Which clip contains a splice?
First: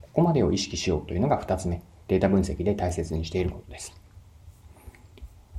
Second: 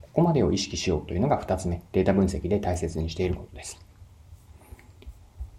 second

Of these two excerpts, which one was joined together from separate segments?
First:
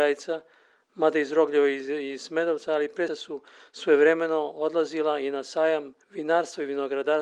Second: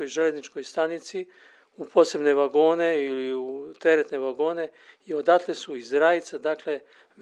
first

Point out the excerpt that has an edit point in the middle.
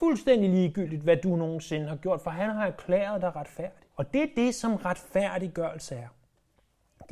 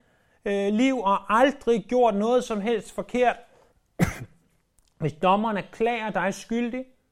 first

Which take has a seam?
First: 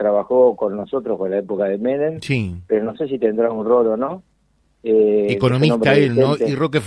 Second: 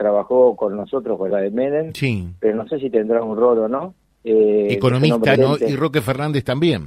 second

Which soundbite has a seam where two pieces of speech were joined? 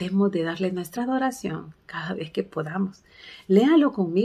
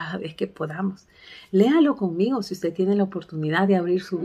first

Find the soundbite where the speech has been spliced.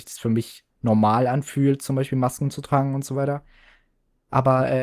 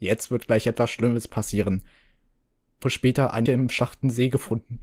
second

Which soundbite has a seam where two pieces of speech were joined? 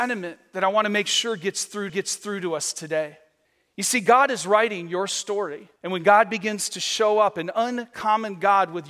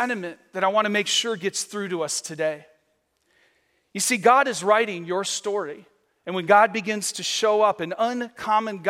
first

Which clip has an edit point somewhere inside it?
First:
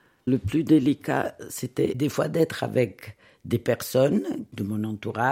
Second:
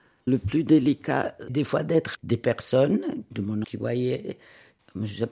second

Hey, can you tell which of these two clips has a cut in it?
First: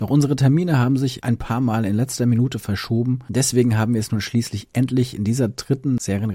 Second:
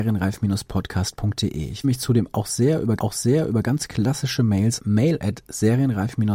second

